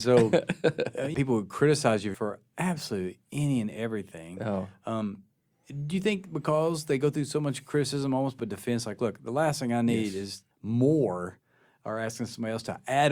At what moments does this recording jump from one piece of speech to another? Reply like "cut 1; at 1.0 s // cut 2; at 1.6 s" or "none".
cut 1; at 1.1 s // cut 2; at 2.1 s // cut 3; at 8.4 s // cut 4; at 10.5 s